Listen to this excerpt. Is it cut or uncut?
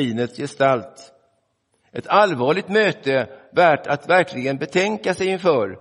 uncut